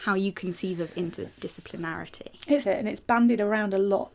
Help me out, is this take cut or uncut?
cut